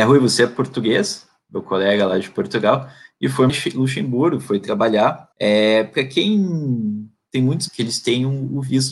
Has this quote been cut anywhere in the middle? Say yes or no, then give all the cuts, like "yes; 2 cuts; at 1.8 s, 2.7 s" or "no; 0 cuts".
yes; 3 cuts; at 3.5 s, 5.3 s, 7.7 s